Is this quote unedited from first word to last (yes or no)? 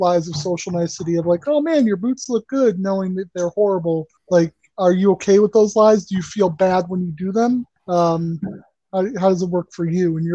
no